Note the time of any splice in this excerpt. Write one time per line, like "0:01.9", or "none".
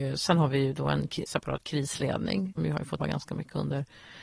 0:01.3
0:02.6
0:03.0